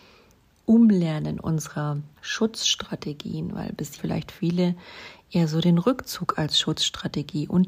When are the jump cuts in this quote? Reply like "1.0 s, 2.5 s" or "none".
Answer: 2.2 s, 4.0 s